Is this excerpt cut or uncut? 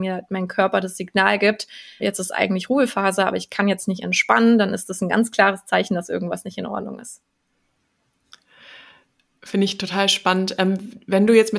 cut